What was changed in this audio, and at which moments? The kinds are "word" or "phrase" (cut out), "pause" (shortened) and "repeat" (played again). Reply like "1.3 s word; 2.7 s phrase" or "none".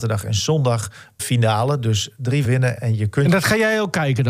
1.2 s word; 2.4 s word; 2.8 s word